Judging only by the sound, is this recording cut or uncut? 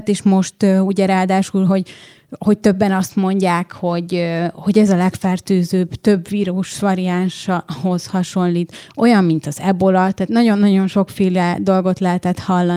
uncut